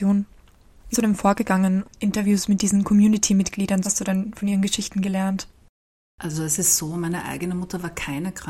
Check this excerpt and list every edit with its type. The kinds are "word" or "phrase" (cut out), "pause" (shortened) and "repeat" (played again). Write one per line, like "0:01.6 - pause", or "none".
0:00.9 - word
0:01.8 - word
0:03.8 - phrase